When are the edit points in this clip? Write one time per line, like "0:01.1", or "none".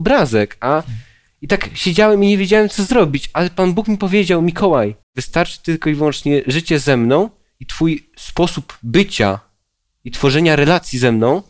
0:05.0